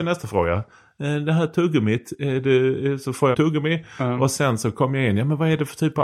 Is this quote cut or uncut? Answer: cut